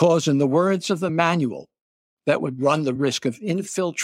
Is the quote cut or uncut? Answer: uncut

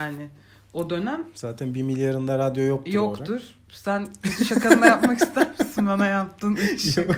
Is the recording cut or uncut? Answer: uncut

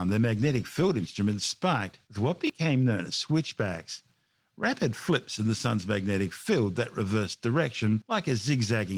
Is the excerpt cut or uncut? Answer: uncut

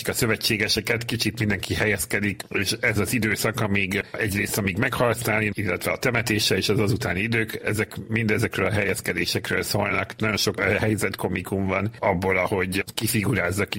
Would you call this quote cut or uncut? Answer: uncut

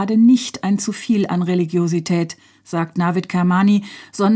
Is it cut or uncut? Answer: uncut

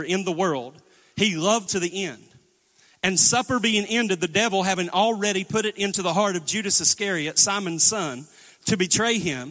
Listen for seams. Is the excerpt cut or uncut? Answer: cut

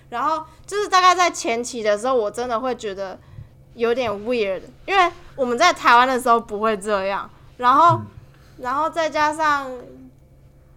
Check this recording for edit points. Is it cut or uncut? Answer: uncut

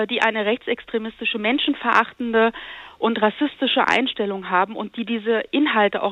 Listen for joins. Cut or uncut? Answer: uncut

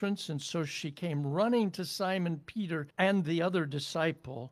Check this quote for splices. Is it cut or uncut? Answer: cut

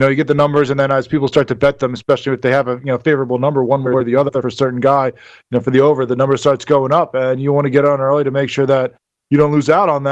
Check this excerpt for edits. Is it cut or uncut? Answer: uncut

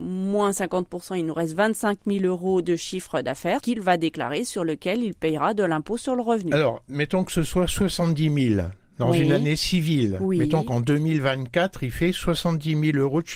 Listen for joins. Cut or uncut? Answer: uncut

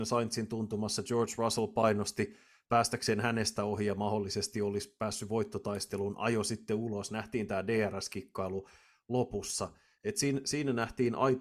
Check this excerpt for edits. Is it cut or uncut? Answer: uncut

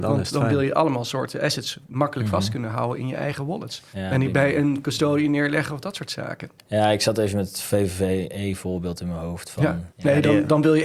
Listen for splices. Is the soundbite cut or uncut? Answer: cut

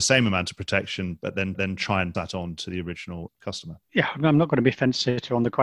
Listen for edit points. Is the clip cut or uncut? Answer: cut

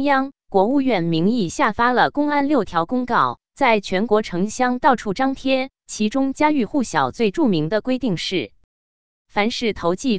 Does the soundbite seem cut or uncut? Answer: uncut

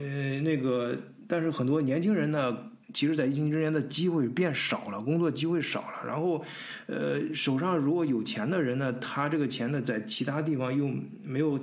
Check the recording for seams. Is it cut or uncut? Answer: cut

